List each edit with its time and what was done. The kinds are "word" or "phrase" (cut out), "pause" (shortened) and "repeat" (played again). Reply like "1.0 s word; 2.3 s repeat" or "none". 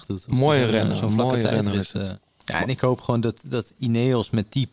none